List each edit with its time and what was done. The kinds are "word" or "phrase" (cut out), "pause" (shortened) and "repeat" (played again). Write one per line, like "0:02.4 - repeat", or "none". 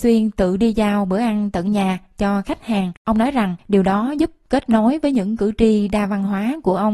0:03.0 - pause
0:03.6 - pause